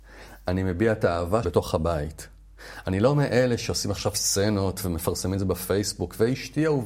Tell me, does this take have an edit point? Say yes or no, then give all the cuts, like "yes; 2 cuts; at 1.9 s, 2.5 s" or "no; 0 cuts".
yes; 1 cut; at 1.4 s